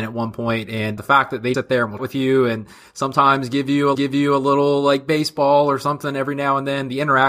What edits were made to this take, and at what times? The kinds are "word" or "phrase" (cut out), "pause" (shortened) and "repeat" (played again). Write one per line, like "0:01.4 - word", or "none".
0:01.0 - word
0:01.5 - word
0:02.0 - word
0:03.9 - repeat